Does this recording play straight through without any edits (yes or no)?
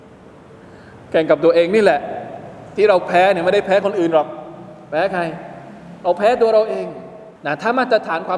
no